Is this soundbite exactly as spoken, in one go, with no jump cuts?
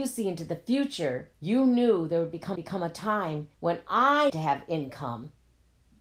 no; 4 cuts; at 1.3 s, 2.6 s, 3.5 s, 4.3 s

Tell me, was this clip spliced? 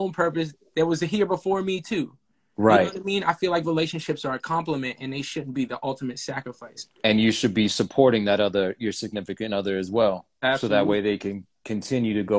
no; 0 cuts

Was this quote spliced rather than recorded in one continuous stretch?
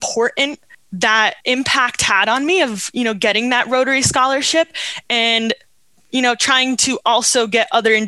yes; 1 cut; at 1.4 s

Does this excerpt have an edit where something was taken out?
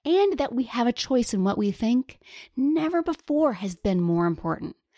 yes; 1 cut; at 3.8 s

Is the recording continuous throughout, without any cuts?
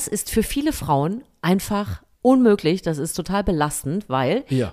no; 1 cut; at 2.1 s

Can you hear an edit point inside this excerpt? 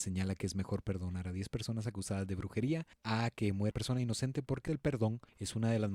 yes; 1 cut; at 3.7 s

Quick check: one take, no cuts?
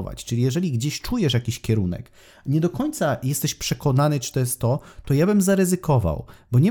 yes; 0 cuts

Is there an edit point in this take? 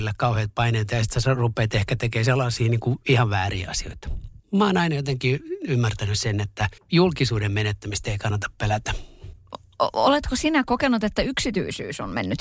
yes; 2 cuts; at 4.4 s, 6.8 s

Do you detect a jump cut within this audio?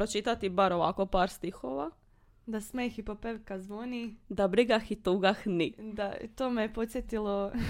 no; 0 cuts

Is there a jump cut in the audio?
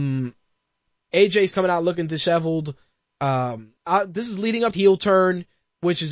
yes; 3 cuts; at 1.5 s, 3.8 s, 4.7 s

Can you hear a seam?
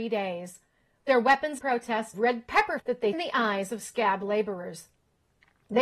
yes; 4 cuts; at 1.6 s, 2.1 s, 2.8 s, 3.1 s

